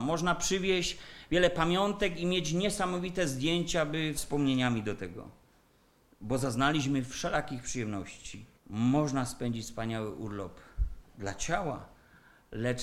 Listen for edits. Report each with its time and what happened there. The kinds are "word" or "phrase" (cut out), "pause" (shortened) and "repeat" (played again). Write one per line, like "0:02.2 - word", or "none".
0:04.1 - word
0:08.6 - pause